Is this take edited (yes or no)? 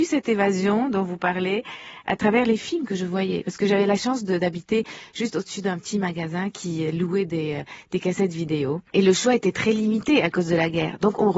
yes